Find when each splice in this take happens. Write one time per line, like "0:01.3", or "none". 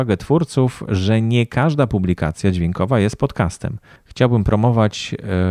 0:04.0